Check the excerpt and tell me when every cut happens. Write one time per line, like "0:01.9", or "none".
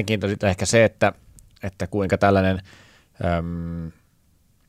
none